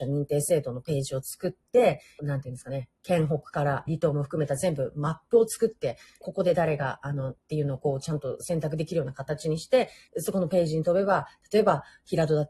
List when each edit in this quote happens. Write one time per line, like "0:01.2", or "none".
0:02.2
0:02.9
0:03.9
0:06.2
0:07.4
0:10.1